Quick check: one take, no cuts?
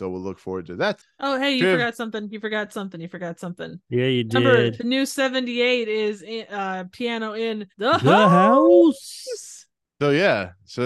no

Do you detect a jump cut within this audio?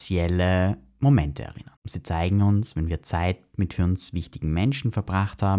yes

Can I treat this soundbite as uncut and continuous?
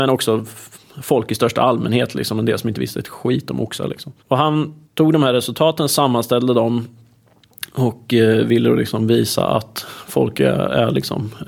no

